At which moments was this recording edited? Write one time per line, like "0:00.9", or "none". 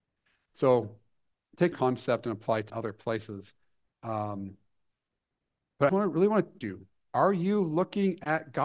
0:01.7
0:02.7
0:05.9
0:06.6